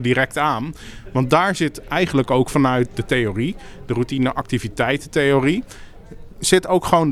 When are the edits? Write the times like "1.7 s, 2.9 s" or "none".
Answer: none